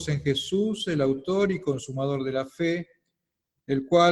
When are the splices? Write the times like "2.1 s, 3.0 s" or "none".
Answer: none